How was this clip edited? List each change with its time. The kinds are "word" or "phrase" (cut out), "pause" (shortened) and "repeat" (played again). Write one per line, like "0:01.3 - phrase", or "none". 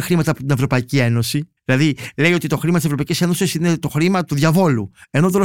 0:01.6 - pause
0:04.3 - word

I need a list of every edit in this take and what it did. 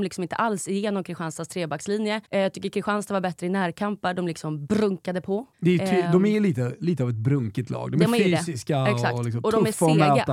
0:02.2 - pause
0:05.5 - pause

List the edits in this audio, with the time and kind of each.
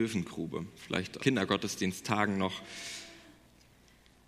0:01.2 - word

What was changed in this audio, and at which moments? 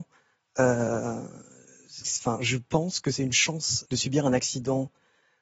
0:02.0 - word
0:03.8 - word

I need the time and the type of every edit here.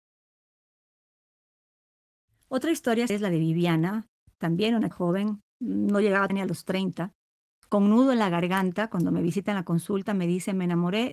0:03.1 - word
0:04.9 - word
0:05.5 - pause
0:06.3 - word
0:07.6 - word

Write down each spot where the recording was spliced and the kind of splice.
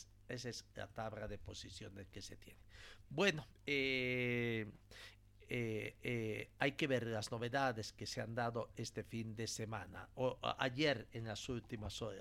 0:03.5 - pause
0:06.0 - repeat

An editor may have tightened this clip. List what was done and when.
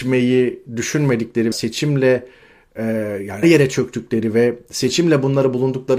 0:01.5 - word
0:03.4 - word

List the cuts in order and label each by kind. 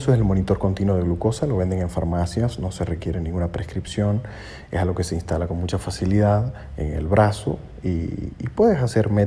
none

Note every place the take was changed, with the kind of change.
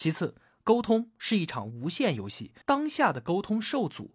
0:02.6 - pause

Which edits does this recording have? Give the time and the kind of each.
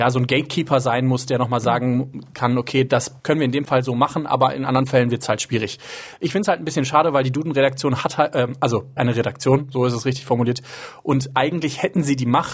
0:03.2 - pause
0:09.0 - phrase

